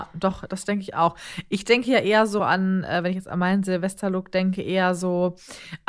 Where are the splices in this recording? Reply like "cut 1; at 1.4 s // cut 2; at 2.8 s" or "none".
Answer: none